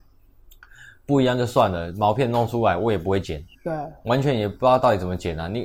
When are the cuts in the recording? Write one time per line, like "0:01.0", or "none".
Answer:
0:03.5